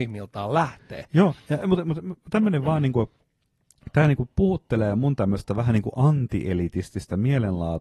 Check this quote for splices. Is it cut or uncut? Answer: uncut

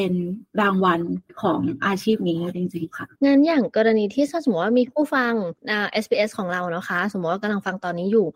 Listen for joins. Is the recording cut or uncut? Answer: cut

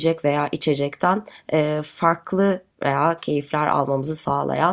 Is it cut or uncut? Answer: cut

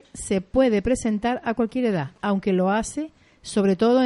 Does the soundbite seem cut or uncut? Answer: cut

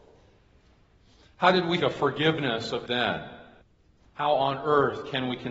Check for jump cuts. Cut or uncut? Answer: cut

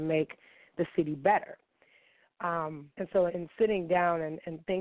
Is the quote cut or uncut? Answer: cut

